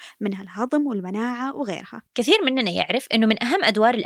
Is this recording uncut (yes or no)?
no